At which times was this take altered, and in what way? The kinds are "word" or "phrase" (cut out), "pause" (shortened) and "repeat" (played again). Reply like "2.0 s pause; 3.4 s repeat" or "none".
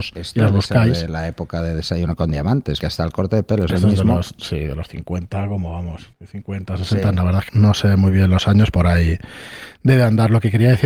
2.8 s word; 6.1 s pause; 7.5 s word; 8.7 s word